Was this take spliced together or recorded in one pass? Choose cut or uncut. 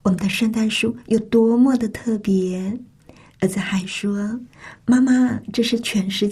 uncut